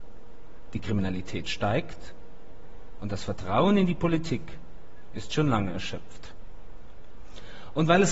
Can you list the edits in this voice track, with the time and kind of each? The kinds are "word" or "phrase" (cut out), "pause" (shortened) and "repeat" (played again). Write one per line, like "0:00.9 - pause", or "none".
none